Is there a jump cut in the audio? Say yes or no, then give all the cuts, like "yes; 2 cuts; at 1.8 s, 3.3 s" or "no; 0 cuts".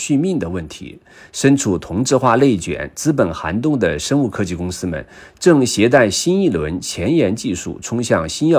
no; 0 cuts